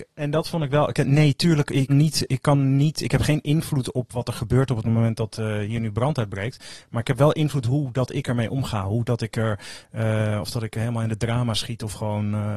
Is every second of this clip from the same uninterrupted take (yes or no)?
no